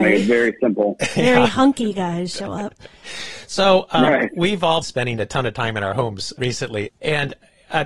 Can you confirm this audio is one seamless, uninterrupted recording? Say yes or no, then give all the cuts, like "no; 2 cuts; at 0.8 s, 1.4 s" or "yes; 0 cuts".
no; 2 cuts; at 4.8 s, 6.4 s